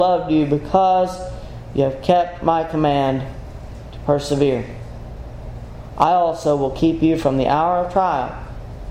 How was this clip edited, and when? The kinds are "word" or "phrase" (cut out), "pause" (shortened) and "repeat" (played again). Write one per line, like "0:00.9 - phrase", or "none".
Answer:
none